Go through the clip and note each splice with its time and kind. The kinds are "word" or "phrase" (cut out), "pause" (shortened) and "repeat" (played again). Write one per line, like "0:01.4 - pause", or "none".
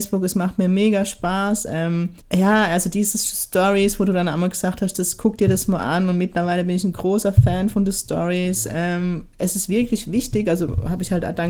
0:02.2 - pause